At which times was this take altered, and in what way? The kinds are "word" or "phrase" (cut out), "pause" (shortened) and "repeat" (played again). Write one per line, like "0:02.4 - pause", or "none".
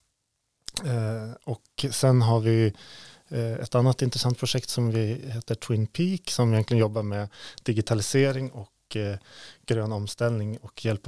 none